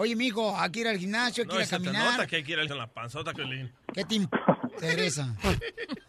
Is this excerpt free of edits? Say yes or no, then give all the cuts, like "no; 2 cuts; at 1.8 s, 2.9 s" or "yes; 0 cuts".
no; 2 cuts; at 2.7 s, 3.3 s